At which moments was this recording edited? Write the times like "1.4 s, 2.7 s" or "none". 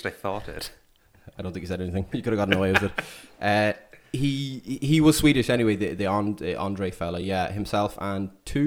none